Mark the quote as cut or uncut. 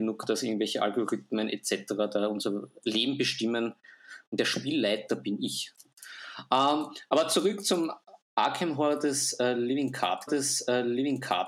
cut